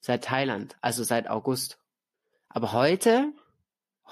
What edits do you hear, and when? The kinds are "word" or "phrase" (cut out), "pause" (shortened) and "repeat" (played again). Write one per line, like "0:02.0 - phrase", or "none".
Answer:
0:02.1 - pause

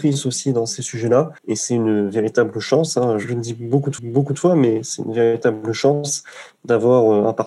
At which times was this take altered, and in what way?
0:01.4 - pause
0:04.0 - repeat

